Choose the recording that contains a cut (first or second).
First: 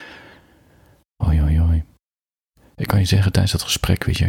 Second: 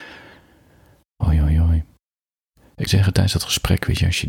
second